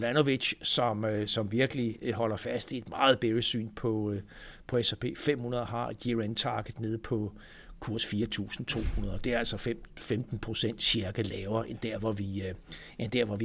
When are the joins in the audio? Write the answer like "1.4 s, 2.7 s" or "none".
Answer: none